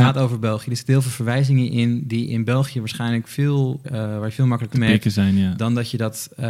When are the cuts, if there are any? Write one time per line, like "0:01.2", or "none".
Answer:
0:03.8
0:04.7